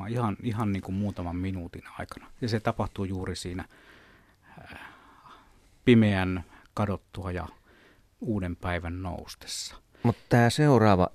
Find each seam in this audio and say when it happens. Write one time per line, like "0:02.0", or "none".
none